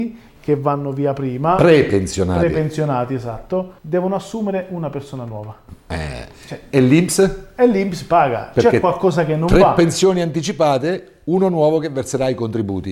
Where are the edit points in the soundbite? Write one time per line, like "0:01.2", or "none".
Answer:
0:03.8